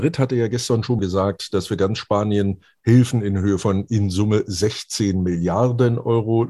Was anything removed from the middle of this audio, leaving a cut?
yes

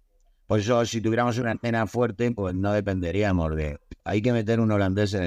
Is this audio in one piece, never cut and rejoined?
yes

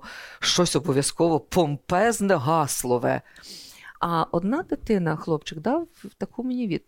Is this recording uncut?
no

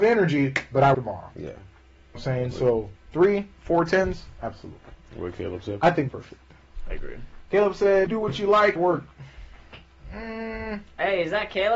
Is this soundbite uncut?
no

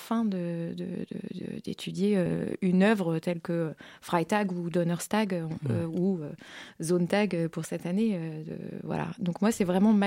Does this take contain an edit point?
no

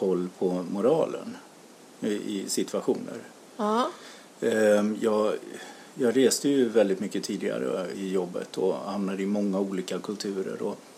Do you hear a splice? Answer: yes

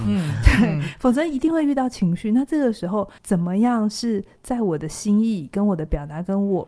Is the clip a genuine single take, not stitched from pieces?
no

